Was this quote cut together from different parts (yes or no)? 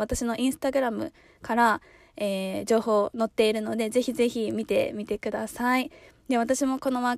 no